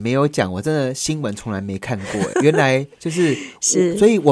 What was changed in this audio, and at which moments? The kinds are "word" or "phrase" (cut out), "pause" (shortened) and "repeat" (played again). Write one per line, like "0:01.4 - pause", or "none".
0:02.3 - word